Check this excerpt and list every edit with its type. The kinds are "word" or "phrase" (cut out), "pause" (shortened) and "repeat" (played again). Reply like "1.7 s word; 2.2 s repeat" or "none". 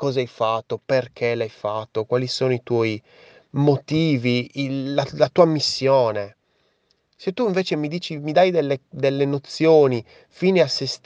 none